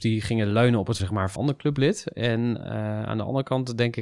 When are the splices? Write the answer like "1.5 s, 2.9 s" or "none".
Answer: 1.0 s, 1.4 s